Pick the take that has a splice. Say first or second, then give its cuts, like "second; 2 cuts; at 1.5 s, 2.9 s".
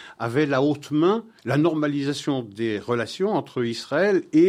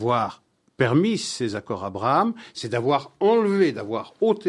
first; 1 cut; at 1.4 s